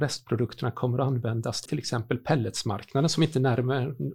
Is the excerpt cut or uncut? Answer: cut